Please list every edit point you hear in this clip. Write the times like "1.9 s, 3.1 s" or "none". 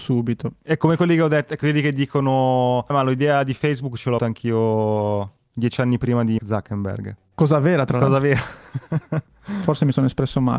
2.9 s, 4.2 s, 6.4 s